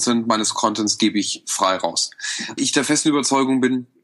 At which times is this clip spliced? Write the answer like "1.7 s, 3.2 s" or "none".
2.6 s